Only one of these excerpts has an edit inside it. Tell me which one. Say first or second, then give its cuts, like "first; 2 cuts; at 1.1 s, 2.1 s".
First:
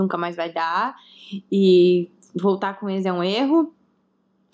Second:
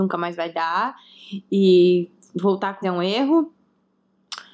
second; 1 cut; at 2.8 s